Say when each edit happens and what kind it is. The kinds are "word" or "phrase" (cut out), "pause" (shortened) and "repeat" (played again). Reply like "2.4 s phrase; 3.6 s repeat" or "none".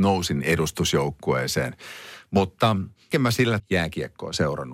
3.1 s word; 3.6 s word

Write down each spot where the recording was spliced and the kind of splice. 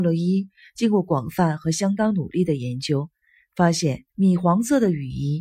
4.1 s pause

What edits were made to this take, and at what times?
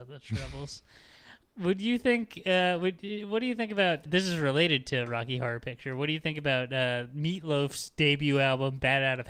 1.4 s word; 4.1 s word

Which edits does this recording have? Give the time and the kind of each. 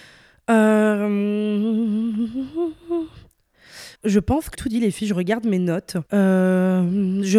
4.0 s pause; 4.5 s word; 6.1 s pause

